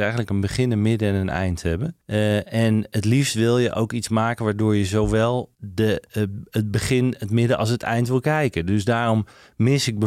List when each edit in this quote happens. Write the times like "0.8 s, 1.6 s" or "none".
2.0 s, 5.5 s